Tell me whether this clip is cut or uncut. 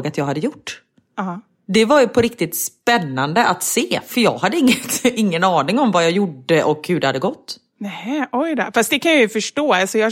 uncut